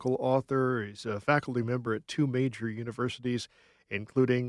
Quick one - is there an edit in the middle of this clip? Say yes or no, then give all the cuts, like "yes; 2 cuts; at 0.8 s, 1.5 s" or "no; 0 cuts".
no; 0 cuts